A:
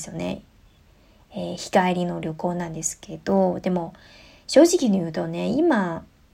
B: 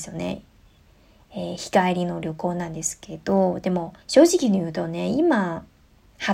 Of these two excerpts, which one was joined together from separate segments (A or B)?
B